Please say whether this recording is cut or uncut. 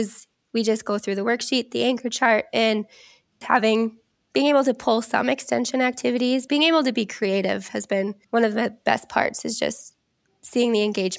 cut